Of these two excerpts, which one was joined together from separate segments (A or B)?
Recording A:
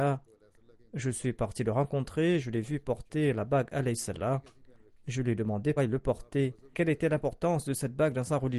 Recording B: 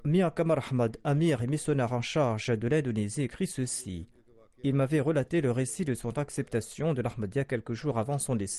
A